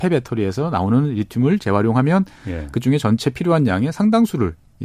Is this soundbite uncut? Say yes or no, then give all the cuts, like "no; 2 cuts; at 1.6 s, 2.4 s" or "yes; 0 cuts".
yes; 0 cuts